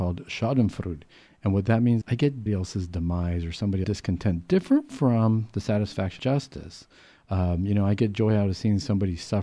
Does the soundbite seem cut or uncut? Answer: cut